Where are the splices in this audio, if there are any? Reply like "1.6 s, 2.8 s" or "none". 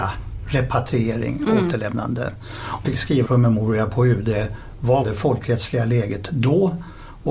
2.8 s, 3.2 s, 5.0 s